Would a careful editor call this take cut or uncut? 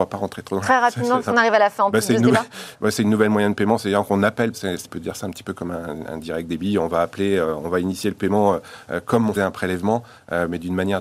cut